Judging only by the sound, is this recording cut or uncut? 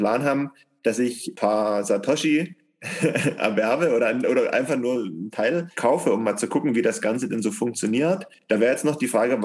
cut